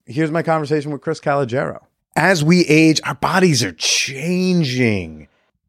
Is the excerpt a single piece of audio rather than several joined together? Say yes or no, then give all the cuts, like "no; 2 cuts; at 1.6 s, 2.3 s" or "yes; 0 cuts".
no; 1 cut; at 2.0 s